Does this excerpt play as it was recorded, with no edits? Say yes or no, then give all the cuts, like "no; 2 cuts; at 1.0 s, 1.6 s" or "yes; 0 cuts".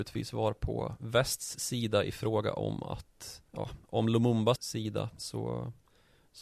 no; 2 cuts; at 3.5 s, 4.6 s